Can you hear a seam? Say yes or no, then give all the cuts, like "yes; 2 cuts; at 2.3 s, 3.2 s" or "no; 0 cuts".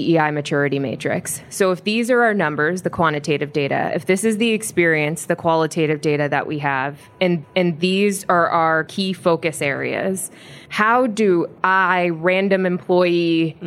yes; 1 cut; at 7.4 s